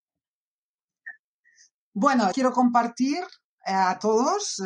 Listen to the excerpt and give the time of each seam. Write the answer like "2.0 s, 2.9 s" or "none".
2.3 s